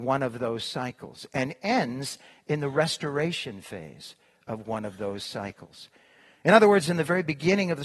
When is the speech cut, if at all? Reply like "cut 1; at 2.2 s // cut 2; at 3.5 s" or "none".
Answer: none